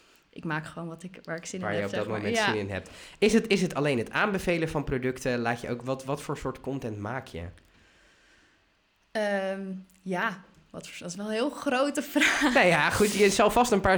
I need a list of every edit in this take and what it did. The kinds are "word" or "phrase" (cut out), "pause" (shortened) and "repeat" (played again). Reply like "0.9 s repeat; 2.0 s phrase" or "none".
none